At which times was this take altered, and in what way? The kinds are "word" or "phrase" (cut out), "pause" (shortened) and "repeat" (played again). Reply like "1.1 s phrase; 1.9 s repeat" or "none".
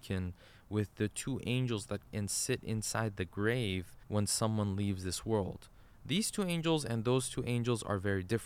2.1 s word; 4.0 s pause